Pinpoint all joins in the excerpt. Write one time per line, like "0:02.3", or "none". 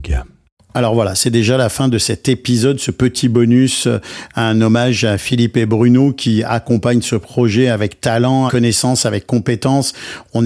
0:08.5